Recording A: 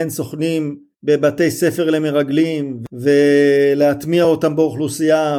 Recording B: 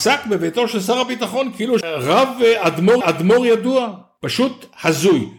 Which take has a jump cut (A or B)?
B